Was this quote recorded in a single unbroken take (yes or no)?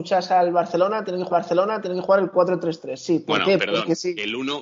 no